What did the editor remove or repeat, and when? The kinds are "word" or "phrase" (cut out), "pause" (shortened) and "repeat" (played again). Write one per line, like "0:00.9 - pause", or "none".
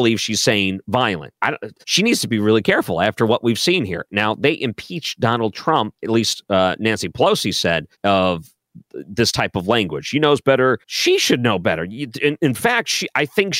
0:01.4 - pause
0:01.8 - pause
0:06.0 - pause
0:07.9 - pause
0:10.8 - pause